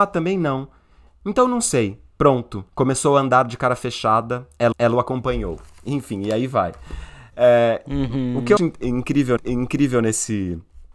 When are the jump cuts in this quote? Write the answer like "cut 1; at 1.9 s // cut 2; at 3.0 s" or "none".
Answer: cut 1; at 2.7 s // cut 2; at 4.7 s // cut 3; at 8.6 s // cut 4; at 9.4 s